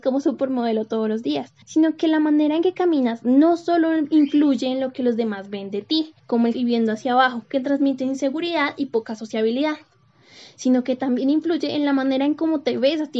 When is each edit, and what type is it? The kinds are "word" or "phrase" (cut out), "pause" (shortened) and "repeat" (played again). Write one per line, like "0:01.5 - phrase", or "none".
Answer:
0:01.6 - pause
0:06.2 - pause
0:06.5 - phrase